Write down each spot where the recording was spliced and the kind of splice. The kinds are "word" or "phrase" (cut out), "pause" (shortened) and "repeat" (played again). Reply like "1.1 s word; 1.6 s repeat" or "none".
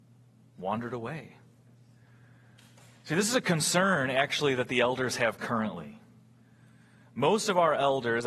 none